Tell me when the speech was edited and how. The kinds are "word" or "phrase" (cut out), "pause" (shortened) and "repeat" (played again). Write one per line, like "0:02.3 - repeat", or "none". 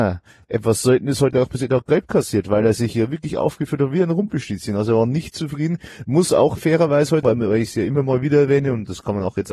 0:07.2 - word